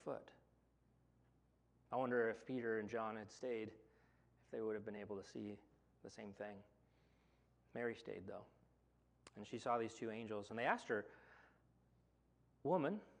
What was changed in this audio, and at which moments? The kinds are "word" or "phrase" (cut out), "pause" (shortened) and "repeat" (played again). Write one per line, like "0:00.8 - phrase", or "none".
none